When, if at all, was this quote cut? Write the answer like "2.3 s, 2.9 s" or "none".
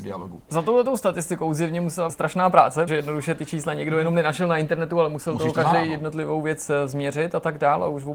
2.1 s, 2.9 s